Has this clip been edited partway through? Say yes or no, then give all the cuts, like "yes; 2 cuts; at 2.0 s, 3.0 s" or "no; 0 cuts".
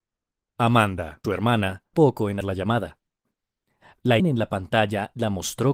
yes; 4 cuts; at 1.2 s, 1.9 s, 2.4 s, 4.2 s